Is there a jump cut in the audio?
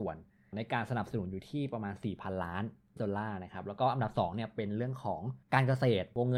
yes; 2 cuts; at 3.0 s, 5.4 s

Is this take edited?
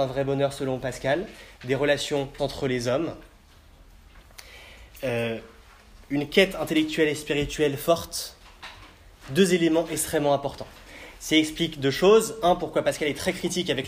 yes; 2 cuts; at 2.4 s, 6.0 s

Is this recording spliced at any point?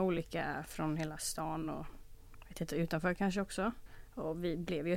no; 0 cuts

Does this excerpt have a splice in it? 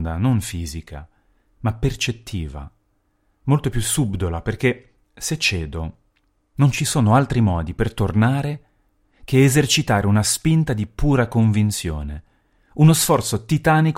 no; 0 cuts

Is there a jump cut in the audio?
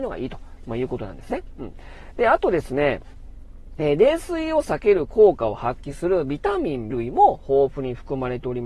yes; 1 cut; at 6.9 s

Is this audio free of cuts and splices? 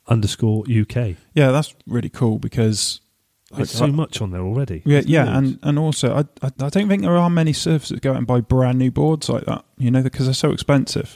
no; 2 cuts; at 1.8 s, 6.5 s

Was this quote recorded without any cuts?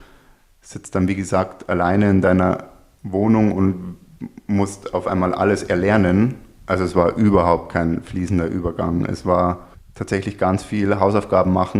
no; 1 cut; at 9.7 s

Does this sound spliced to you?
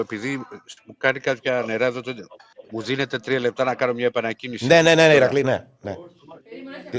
no; 0 cuts

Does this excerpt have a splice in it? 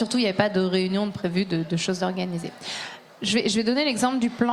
no; 0 cuts

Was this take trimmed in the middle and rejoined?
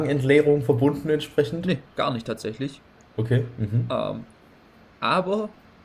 no; 0 cuts

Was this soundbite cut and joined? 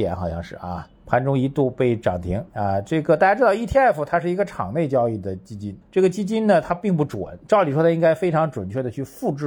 yes; 3 cuts; at 0.9 s, 2.5 s, 5.8 s

